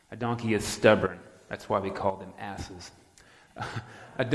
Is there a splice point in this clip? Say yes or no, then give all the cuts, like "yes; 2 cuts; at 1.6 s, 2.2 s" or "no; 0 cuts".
no; 0 cuts